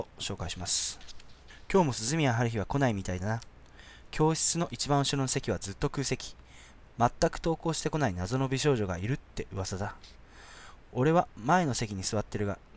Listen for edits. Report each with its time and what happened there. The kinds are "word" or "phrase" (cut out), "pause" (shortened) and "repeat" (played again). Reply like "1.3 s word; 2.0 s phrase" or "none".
none